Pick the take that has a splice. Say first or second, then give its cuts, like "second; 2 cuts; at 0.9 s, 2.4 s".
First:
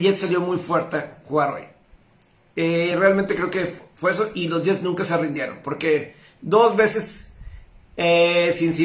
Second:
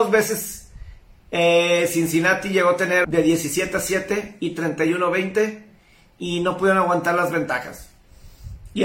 second; 1 cut; at 3.0 s